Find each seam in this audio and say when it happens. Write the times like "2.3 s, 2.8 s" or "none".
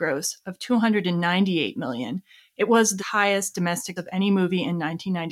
3.0 s, 4.0 s